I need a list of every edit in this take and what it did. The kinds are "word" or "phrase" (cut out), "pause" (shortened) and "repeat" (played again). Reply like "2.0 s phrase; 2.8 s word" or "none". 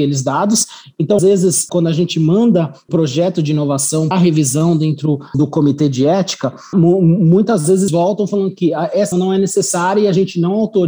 1.2 s word; 1.7 s word; 2.9 s word; 4.1 s word; 5.3 s word; 6.7 s word; 7.9 s word; 9.1 s word

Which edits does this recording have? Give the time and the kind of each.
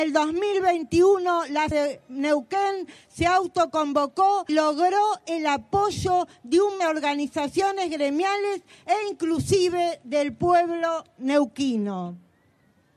1.7 s phrase; 4.5 s word; 6.8 s phrase

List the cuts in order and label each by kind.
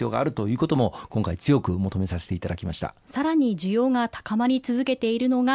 3.0 s pause

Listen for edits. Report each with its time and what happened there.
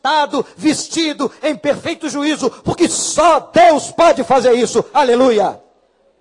none

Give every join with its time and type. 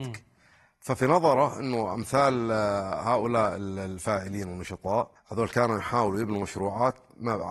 5.2 s pause

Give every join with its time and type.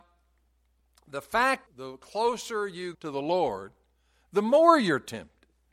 1.7 s word; 2.9 s word

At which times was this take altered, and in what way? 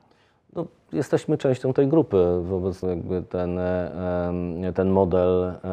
2.8 s word

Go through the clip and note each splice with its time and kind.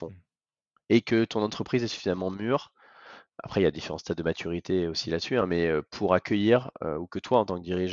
none

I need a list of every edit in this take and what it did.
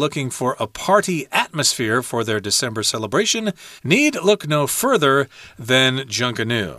3.8 s pause

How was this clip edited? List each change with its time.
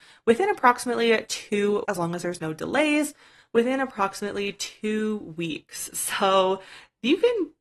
1.8 s word

